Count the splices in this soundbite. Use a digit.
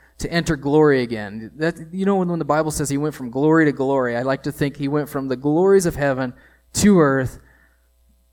0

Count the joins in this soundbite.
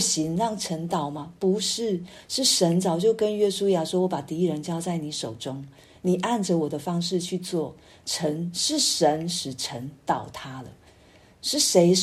0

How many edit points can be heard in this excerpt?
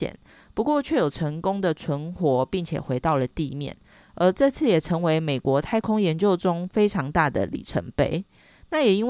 0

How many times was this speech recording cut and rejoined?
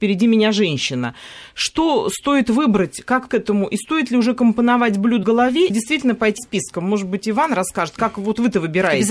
4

